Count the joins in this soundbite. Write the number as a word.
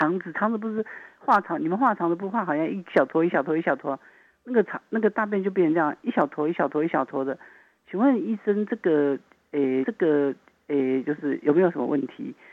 one